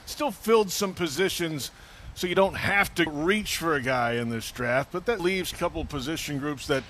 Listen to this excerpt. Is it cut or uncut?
cut